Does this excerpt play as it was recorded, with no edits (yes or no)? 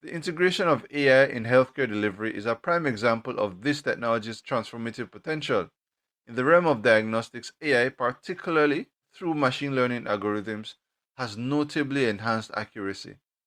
yes